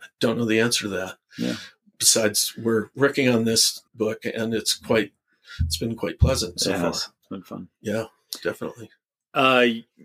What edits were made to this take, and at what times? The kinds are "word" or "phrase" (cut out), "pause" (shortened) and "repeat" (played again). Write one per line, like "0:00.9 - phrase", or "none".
0:03.9 - pause